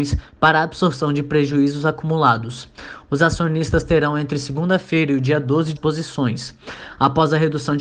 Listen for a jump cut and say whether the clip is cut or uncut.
cut